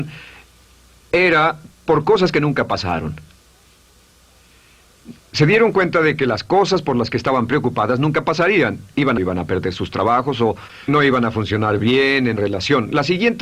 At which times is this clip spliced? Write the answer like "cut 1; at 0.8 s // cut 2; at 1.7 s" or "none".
cut 1; at 1.7 s // cut 2; at 5.2 s // cut 3; at 9.2 s // cut 4; at 10.9 s // cut 5; at 12.4 s